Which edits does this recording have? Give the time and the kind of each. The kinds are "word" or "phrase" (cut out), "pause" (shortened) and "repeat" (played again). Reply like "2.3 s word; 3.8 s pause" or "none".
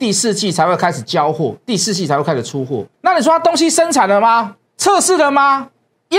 2.9 s pause; 4.7 s pause